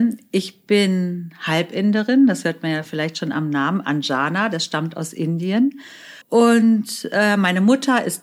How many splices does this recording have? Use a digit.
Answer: 1